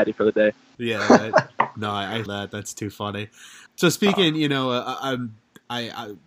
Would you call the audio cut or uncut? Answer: cut